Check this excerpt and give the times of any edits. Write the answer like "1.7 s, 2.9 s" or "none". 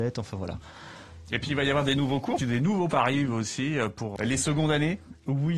2.4 s, 2.9 s, 4.2 s